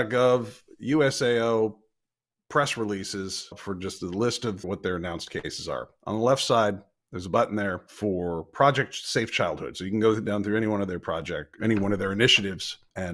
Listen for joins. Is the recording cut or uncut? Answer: uncut